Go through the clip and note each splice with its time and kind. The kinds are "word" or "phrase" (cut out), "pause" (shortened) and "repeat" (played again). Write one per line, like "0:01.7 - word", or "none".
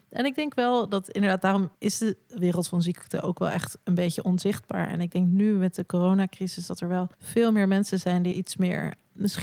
0:07.1 - pause
0:08.3 - word